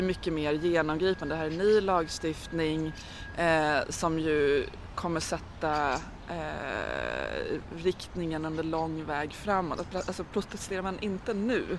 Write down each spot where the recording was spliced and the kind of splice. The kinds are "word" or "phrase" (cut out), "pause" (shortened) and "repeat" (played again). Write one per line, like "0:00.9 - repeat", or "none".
none